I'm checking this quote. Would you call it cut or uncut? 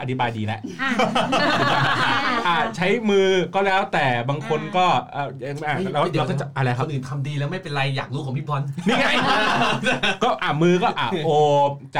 uncut